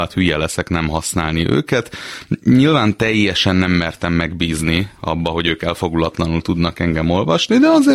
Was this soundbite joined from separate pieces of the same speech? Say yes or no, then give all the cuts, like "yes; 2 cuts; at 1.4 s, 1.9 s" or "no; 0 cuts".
no; 0 cuts